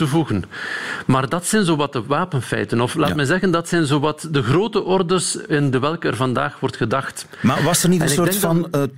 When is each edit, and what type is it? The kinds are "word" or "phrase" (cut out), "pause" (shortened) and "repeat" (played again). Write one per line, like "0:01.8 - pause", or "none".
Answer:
none